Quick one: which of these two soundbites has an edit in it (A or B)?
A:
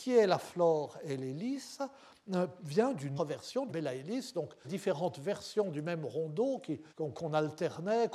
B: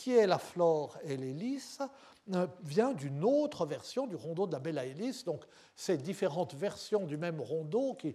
A